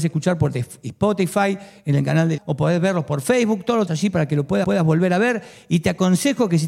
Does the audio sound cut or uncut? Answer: cut